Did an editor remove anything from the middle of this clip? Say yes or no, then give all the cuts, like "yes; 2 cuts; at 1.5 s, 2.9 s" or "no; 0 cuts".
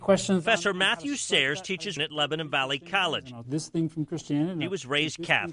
yes; 2 cuts; at 2.0 s, 3.4 s